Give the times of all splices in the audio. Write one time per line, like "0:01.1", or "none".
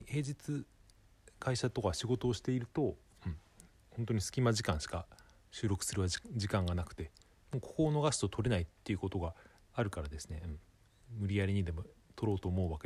none